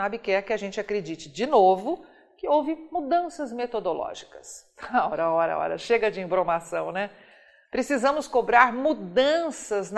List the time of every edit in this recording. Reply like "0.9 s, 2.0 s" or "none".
none